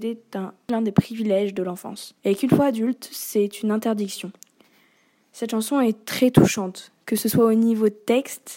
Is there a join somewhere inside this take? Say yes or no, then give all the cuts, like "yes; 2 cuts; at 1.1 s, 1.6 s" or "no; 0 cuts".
yes; 1 cut; at 2.2 s